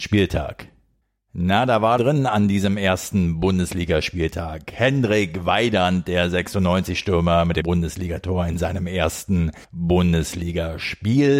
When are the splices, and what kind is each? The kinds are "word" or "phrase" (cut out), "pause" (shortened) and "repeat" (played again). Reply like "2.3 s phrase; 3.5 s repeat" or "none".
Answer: 2.0 s phrase; 7.6 s word; 9.6 s pause